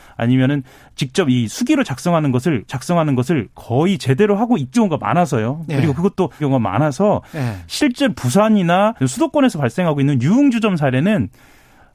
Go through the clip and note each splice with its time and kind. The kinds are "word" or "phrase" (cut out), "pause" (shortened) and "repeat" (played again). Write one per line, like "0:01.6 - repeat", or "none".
0:02.7 - repeat
0:04.7 - word
0:06.4 - phrase
0:09.0 - pause

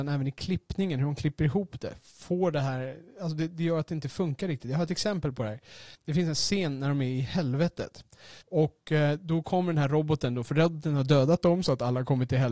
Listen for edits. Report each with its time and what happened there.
0:06.0 - pause
0:08.4 - pause

